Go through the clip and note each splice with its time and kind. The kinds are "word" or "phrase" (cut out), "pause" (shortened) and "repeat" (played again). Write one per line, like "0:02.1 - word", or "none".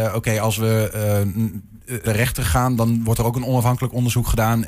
0:02.1 - word